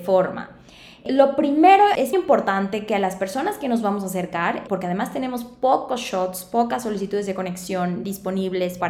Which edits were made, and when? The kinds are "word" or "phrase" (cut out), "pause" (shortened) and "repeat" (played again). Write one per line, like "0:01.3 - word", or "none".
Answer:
0:02.1 - word